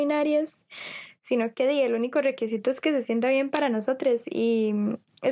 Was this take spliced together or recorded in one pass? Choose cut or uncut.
uncut